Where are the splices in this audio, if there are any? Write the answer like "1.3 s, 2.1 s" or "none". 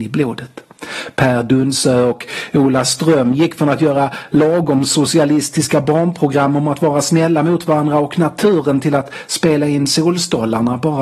none